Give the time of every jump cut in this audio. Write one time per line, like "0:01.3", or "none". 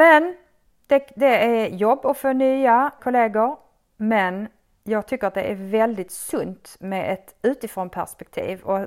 0:03.0